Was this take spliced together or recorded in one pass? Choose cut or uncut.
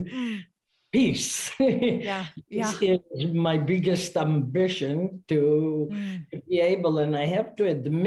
uncut